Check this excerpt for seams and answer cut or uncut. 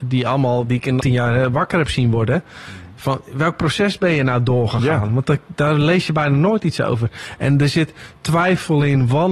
cut